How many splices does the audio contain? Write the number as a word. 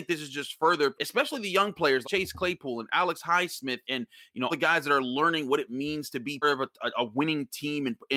five